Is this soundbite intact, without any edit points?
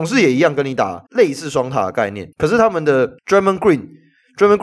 no; 3 cuts; at 1.1 s, 2.3 s, 3.2 s

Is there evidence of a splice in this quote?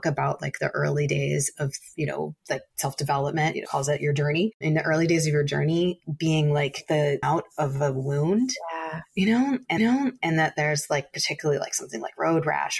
yes; 3 cuts; at 3.6 s, 7.2 s, 9.8 s

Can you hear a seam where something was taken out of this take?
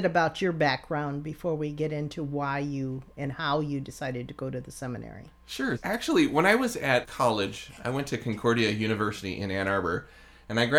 no; 0 cuts

